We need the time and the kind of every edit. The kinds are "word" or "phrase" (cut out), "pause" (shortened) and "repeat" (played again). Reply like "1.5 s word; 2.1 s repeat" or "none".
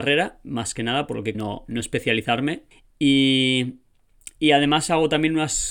1.3 s phrase; 2.7 s pause